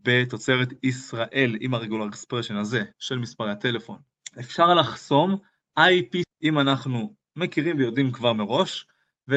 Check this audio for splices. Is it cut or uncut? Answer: cut